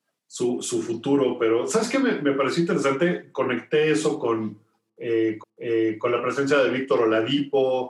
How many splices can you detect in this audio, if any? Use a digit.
1